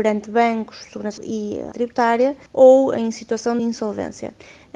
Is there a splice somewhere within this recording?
yes; 4 cuts; at 1.2 s, 1.7 s, 2.5 s, 3.6 s

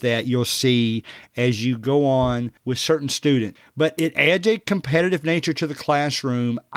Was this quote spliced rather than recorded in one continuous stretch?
yes; 1 cut; at 2.6 s

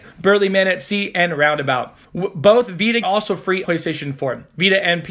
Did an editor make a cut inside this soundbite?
yes; 3 cuts; at 2.0 s, 3.0 s, 3.6 s

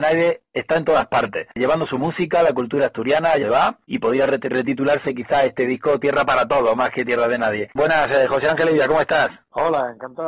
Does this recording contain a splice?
yes; 1 cut; at 3.4 s

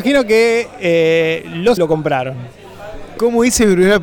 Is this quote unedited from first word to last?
no; 1 cut; at 1.8 s

